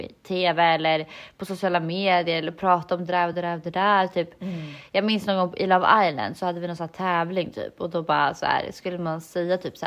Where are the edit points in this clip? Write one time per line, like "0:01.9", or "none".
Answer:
none